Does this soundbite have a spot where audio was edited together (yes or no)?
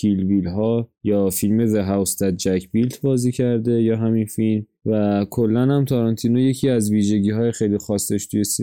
no